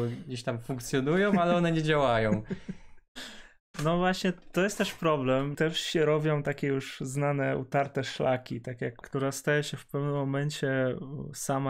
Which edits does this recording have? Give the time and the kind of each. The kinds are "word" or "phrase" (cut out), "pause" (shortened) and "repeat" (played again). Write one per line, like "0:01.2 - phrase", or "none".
0:05.5 - phrase
0:09.0 - phrase